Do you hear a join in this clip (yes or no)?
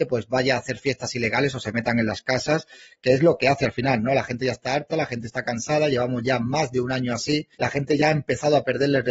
yes